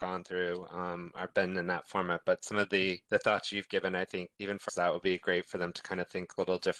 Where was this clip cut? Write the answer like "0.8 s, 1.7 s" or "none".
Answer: 3.0 s, 4.3 s, 4.7 s